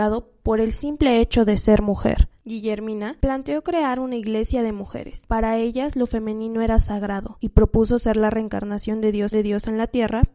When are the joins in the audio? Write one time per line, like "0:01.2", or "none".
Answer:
0:09.3